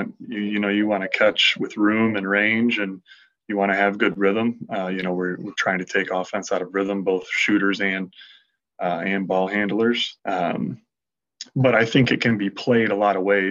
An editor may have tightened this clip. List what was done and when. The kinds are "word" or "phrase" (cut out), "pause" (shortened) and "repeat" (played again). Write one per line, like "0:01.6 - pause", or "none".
0:10.2 - pause